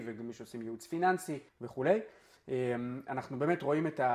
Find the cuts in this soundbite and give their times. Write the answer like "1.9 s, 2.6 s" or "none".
1.5 s

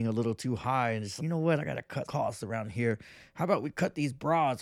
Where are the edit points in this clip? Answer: 1.2 s, 2.0 s

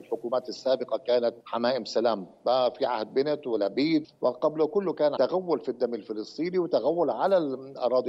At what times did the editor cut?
1.4 s, 4.0 s, 5.2 s

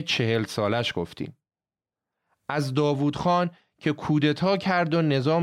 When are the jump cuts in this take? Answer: none

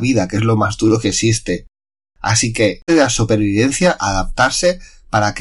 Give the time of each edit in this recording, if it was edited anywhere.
2.9 s, 4.0 s

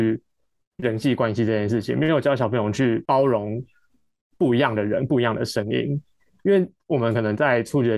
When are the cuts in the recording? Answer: none

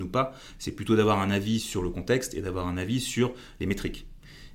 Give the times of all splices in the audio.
none

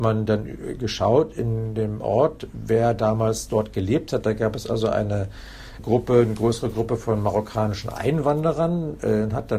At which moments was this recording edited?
5.8 s

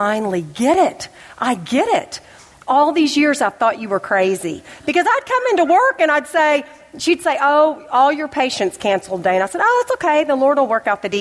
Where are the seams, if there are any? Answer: none

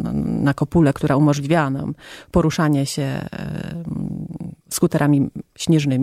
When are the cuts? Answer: 4.6 s

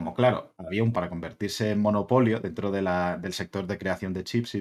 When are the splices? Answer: 0.9 s

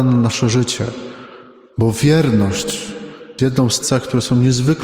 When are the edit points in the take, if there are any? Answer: 3.4 s, 3.8 s

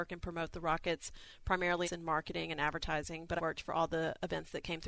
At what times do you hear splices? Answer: 1.8 s, 3.4 s

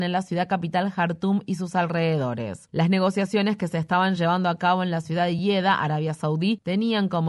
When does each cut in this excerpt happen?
none

